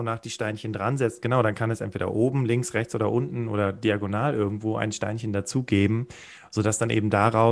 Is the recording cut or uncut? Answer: uncut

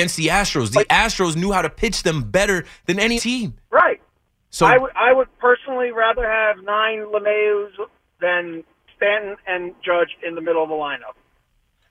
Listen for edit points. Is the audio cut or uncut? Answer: cut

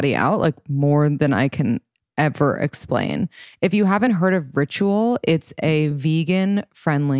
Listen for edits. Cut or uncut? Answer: uncut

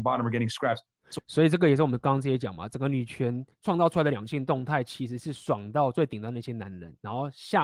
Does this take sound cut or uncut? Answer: cut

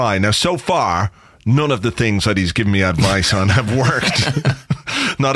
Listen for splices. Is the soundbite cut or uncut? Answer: uncut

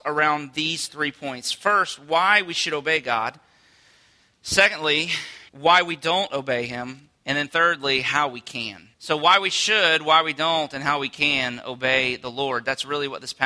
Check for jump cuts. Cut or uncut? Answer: cut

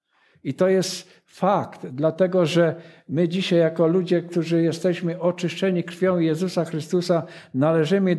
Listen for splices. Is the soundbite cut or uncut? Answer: uncut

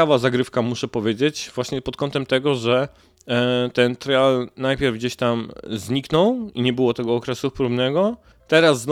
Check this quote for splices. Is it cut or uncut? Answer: uncut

